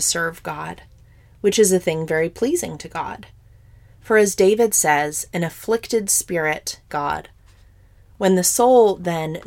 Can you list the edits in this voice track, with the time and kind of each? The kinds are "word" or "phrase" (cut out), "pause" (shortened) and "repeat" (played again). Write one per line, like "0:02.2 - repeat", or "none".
0:06.9 - phrase